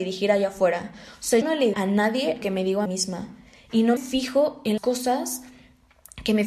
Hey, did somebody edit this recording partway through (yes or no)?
yes